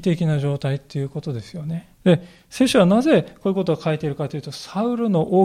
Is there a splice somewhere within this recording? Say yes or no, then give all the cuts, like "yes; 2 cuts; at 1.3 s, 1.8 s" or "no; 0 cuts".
yes; 1 cut; at 1.9 s